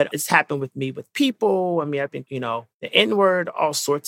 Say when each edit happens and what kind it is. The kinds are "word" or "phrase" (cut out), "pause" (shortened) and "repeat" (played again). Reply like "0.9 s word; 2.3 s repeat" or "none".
2.2 s word; 2.7 s pause